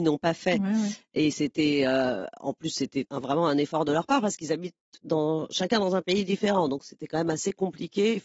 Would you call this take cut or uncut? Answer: uncut